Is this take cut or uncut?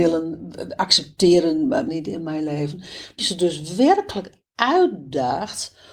cut